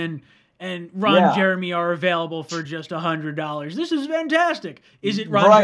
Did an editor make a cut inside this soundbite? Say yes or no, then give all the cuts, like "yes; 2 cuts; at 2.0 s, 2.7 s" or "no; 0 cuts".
no; 0 cuts